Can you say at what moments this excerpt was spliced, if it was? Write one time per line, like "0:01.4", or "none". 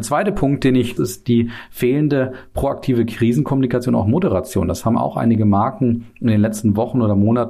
0:01.0

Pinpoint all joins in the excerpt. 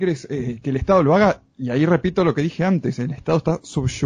none

